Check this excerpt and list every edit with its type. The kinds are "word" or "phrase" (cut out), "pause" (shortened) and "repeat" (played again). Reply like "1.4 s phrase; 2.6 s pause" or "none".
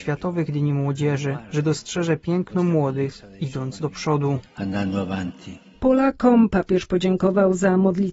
none